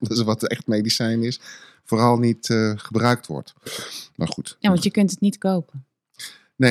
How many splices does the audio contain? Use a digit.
0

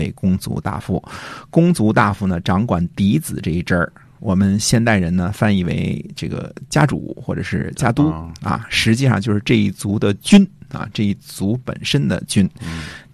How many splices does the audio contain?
0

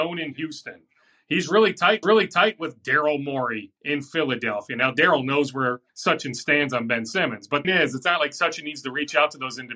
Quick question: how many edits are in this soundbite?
4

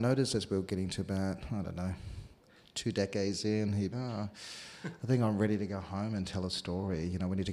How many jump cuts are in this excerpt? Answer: 1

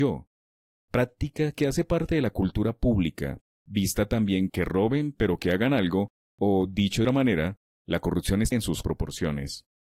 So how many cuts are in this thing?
4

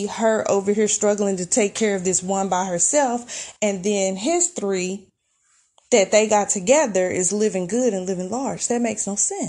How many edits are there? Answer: 0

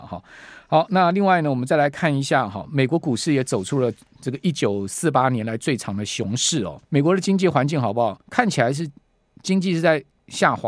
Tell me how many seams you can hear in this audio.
2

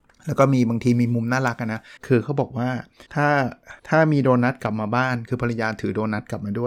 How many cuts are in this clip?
3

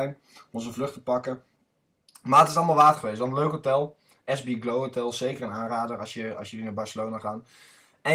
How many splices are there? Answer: 0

